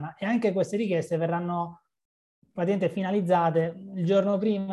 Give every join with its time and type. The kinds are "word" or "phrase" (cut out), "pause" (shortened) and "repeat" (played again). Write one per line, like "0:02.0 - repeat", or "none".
none